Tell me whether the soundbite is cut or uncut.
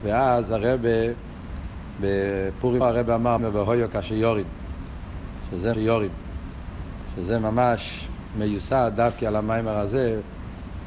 cut